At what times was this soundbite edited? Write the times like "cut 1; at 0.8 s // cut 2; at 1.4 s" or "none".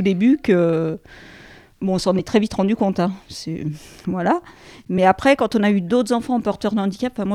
none